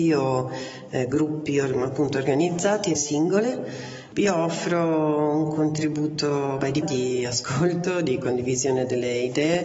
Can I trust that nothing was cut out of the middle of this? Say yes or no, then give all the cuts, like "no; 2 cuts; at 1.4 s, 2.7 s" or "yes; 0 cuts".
no; 2 cuts; at 3.0 s, 6.8 s